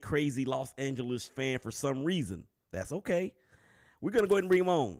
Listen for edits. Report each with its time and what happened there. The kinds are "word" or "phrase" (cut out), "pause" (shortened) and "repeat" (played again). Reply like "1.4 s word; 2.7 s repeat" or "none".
1.3 s word